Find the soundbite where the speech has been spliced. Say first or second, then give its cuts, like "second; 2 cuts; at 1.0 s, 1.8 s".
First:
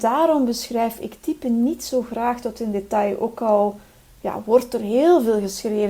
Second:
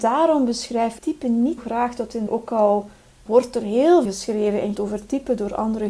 second; 6 cuts; at 1.0 s, 1.6 s, 2.3 s, 3.3 s, 4.0 s, 4.7 s